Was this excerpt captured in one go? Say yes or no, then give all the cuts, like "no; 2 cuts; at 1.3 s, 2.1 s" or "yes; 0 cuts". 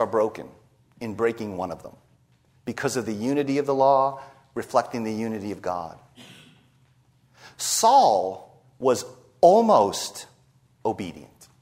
yes; 0 cuts